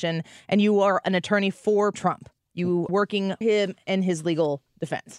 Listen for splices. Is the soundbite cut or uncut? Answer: cut